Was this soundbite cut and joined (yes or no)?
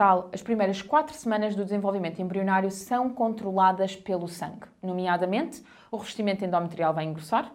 no